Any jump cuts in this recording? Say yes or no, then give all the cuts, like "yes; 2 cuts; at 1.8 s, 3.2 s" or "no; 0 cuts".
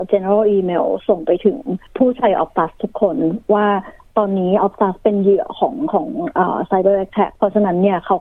no; 0 cuts